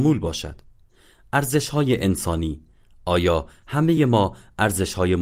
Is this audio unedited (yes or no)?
yes